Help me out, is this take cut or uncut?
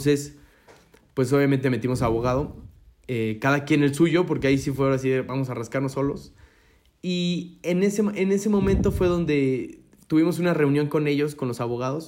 uncut